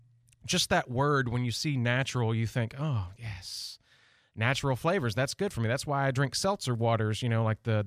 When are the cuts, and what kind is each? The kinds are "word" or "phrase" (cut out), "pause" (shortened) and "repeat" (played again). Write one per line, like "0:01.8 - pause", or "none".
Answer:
none